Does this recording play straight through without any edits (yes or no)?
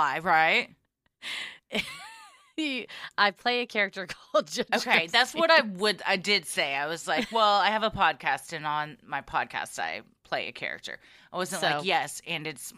yes